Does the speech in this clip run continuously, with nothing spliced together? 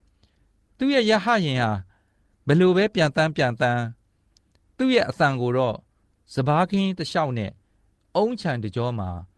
yes; 0 cuts

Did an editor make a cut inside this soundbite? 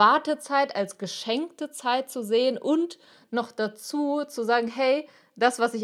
no; 0 cuts

